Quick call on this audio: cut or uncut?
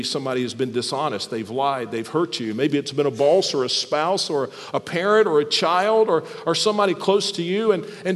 uncut